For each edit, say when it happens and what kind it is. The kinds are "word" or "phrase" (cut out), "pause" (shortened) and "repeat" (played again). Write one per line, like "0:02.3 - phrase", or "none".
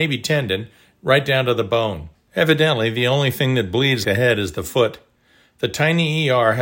0:02.2 - pause
0:04.0 - word